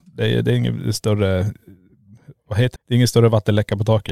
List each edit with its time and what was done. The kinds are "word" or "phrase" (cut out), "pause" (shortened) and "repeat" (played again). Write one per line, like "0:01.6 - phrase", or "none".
0:02.8 - word